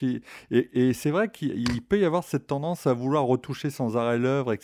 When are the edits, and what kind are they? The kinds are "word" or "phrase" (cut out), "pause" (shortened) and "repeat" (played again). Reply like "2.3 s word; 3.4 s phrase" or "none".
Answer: none